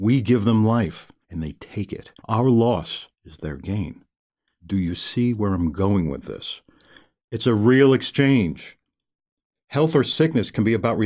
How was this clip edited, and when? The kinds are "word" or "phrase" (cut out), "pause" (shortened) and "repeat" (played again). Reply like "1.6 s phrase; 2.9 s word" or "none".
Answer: 1.2 s pause; 2.2 s pause; 3.1 s pause